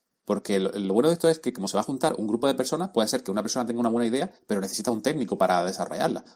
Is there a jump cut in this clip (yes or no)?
no